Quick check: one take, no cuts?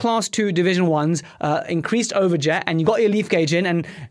yes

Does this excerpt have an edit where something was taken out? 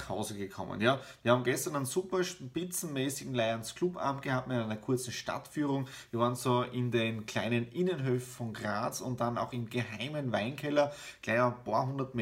no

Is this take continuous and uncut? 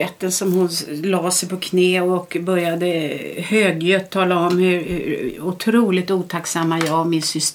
yes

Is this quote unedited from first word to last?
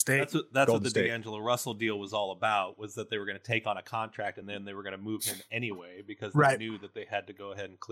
yes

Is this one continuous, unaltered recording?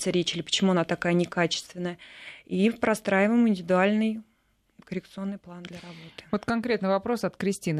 yes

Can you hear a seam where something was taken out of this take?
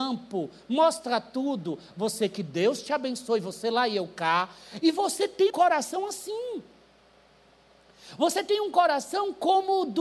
yes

